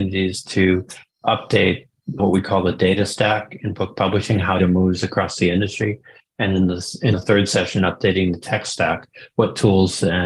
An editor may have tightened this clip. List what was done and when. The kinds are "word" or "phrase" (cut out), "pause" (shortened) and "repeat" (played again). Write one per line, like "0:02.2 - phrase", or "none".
0:02.2 - word
0:04.6 - word
0:07.1 - word